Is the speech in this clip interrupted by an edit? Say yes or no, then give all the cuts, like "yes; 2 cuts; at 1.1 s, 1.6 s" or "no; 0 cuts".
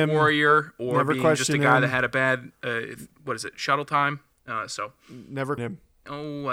yes; 2 cuts; at 3.1 s, 5.6 s